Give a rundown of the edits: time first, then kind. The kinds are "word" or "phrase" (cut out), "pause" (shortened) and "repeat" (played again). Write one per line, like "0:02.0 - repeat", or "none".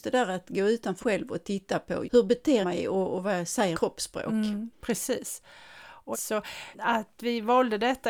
0:01.0 - word
0:02.0 - word
0:02.6 - word
0:03.7 - word
0:04.7 - word
0:06.1 - word
0:06.7 - word